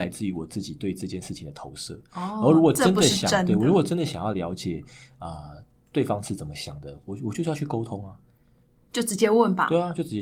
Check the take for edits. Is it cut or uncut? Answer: uncut